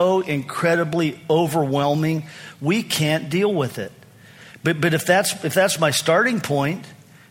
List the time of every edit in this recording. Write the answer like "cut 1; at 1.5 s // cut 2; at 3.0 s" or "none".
none